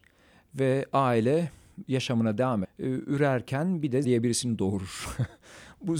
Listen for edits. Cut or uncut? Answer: cut